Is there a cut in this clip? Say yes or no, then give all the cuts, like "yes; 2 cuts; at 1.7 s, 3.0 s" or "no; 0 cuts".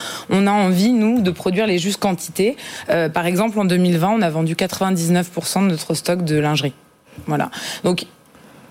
no; 0 cuts